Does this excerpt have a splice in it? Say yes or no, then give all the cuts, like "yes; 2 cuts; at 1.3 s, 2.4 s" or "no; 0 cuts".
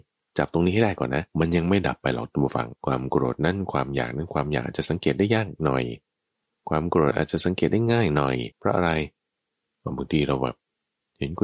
yes; 3 cuts; at 1.3 s, 2.8 s, 8.5 s